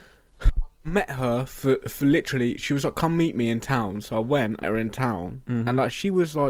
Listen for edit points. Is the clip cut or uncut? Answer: cut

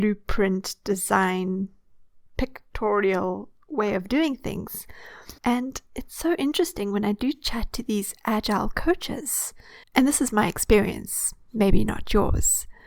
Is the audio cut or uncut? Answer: cut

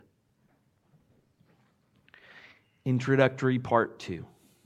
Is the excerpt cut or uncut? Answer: uncut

